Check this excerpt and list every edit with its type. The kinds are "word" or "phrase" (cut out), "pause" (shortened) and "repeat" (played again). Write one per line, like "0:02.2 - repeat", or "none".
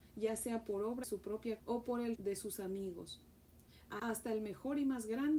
0:01.0 - word
0:01.6 - word
0:02.2 - word
0:04.0 - word